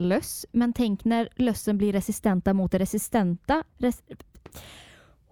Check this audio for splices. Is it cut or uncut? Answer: cut